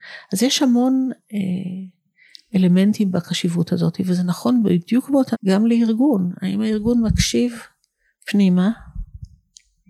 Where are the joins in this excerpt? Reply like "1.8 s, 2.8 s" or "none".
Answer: 5.3 s